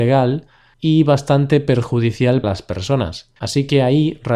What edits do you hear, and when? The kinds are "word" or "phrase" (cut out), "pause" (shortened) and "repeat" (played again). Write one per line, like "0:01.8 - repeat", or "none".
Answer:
0:02.4 - word
0:03.4 - pause